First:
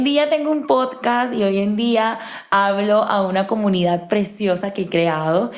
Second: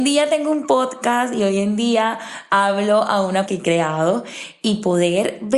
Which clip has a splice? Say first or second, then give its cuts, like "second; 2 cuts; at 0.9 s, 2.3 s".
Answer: second; 1 cut; at 3.5 s